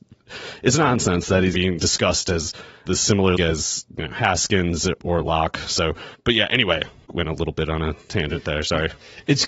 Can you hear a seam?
yes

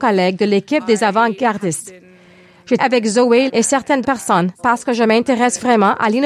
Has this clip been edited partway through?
yes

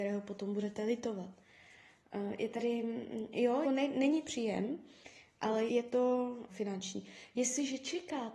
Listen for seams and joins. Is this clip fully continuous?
no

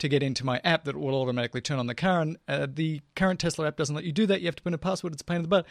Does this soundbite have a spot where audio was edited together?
no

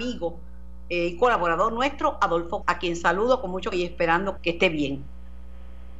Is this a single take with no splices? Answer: no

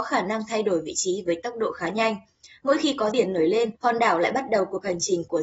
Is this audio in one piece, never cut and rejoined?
no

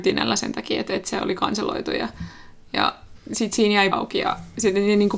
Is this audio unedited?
no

